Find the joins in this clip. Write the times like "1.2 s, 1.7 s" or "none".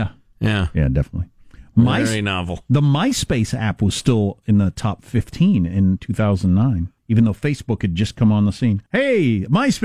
7.0 s, 8.9 s